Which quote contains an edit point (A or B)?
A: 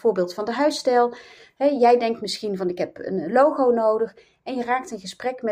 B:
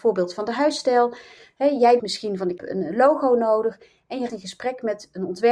B